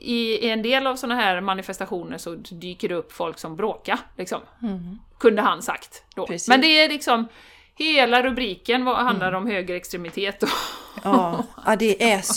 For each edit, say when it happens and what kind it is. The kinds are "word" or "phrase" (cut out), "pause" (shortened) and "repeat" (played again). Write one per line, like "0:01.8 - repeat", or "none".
0:03.5 - phrase